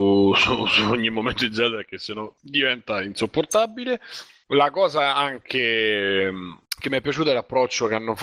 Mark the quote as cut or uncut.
uncut